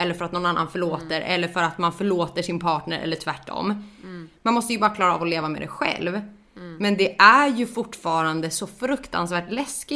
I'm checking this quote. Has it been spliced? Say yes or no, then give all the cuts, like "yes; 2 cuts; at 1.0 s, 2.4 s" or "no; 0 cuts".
no; 0 cuts